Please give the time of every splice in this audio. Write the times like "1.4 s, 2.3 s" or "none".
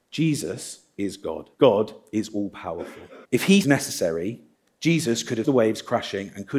1.5 s, 3.2 s, 3.6 s, 4.5 s, 5.4 s